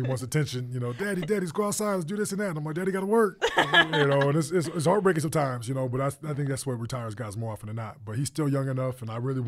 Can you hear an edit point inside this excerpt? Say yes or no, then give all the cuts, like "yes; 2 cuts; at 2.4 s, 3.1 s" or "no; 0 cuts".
no; 0 cuts